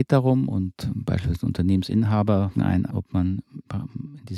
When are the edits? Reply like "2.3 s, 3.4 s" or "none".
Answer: 2.5 s, 2.9 s